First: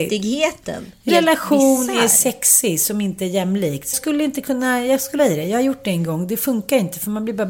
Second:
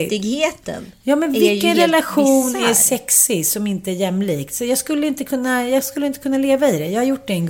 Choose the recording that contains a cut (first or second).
first